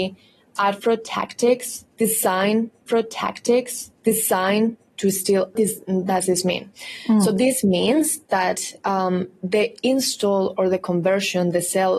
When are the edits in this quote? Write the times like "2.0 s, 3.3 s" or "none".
2.9 s, 5.5 s